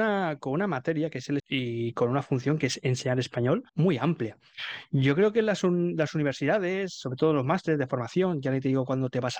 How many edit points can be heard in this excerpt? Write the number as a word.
two